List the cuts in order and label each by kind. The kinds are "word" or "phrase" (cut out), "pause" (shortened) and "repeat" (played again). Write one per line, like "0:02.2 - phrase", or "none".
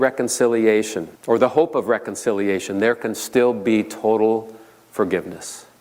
0:01.2 - pause